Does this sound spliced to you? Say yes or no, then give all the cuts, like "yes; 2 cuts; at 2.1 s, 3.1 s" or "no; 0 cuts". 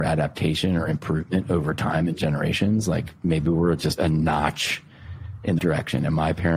yes; 3 cuts; at 3.2 s, 4.0 s, 5.6 s